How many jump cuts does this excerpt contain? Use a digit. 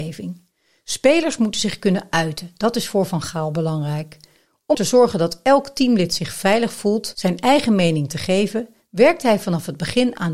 1